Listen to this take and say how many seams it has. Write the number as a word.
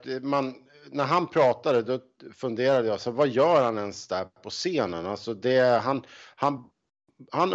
zero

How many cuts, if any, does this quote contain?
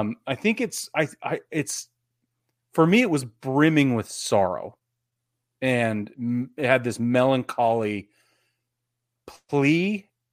zero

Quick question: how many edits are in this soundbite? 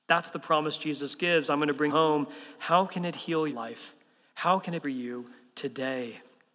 three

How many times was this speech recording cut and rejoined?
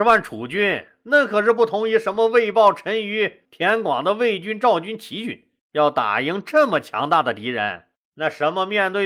two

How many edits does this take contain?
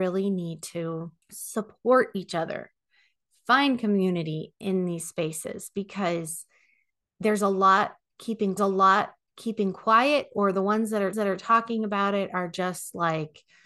three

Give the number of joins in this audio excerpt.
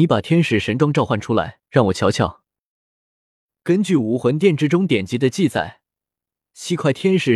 one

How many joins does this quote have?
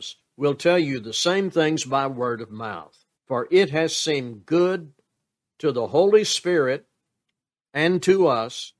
one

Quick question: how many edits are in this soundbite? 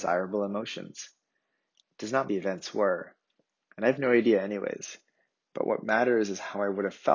one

